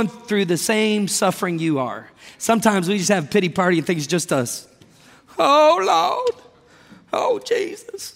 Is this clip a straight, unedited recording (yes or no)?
yes